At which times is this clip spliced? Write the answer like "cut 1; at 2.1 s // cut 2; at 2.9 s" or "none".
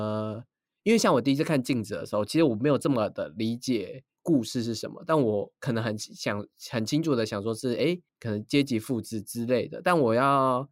none